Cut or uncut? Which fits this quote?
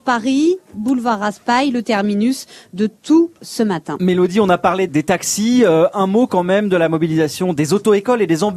cut